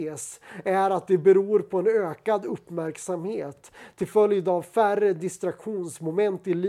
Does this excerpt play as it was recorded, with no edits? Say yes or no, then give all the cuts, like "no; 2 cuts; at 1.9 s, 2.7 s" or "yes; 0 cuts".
yes; 0 cuts